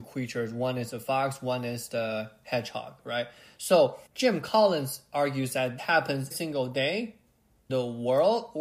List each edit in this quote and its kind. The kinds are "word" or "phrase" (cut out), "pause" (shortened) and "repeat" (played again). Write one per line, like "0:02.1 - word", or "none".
0:04.1 - pause
0:05.8 - word
0:06.3 - word
0:07.7 - word